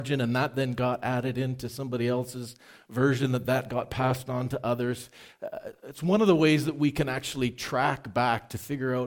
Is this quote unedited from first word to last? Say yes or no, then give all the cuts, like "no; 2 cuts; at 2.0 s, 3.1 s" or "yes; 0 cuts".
yes; 0 cuts